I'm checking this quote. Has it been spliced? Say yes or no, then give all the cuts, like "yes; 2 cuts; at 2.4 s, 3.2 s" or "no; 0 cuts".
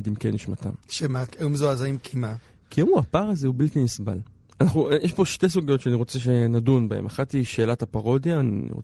no; 0 cuts